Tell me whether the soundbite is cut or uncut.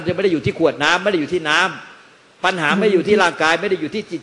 uncut